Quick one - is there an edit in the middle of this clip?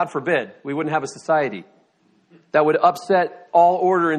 no; 0 cuts

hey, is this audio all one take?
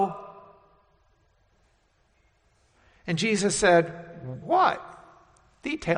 no; 1 cut; at 4.4 s

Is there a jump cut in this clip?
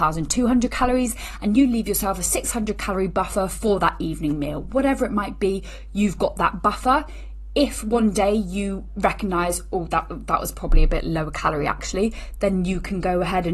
no; 0 cuts

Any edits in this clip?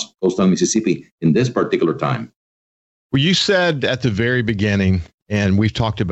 no; 0 cuts

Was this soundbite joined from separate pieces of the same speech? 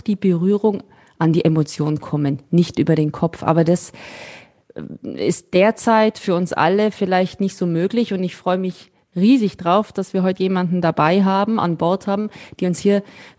no; 0 cuts

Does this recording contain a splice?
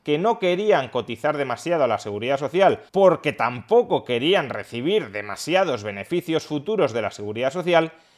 yes; 1 cut; at 2.9 s

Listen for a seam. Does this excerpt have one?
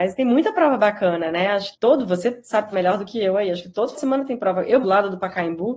yes; 4 cuts; at 1.7 s, 2.7 s, 3.9 s, 4.8 s

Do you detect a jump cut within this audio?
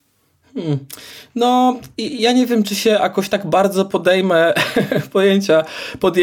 no; 0 cuts

